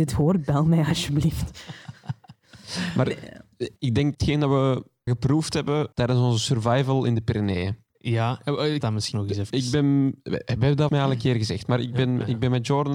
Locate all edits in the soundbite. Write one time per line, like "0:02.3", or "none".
0:03.8
0:04.1
0:05.1
0:05.9
0:07.9
0:08.8
0:09.1
0:10.9